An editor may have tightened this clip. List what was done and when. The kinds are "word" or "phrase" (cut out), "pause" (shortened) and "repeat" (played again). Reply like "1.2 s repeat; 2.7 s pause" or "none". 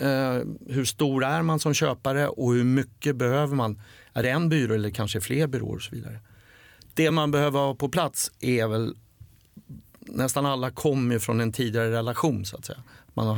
none